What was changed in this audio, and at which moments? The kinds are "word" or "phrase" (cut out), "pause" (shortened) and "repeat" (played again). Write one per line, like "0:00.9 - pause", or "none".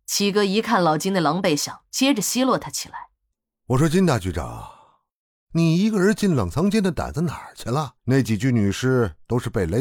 0:08.0 - pause